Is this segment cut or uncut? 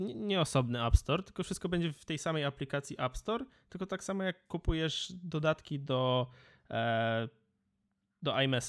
uncut